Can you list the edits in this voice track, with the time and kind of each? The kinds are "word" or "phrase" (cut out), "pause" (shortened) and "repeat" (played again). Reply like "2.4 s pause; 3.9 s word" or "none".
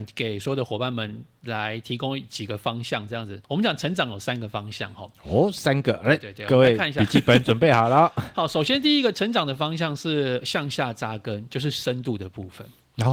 3.4 s pause